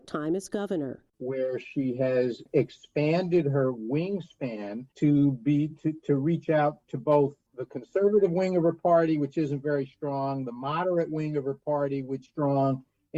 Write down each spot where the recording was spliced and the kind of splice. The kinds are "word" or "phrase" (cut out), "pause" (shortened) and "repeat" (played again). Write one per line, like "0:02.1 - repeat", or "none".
0:04.9 - pause
0:12.3 - word